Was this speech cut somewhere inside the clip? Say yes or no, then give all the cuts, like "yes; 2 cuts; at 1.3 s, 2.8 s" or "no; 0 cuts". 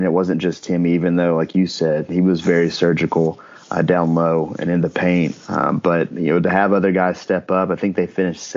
no; 0 cuts